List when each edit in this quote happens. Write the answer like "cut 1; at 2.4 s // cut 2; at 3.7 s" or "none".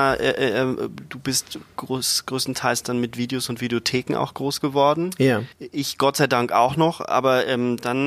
cut 1; at 5.5 s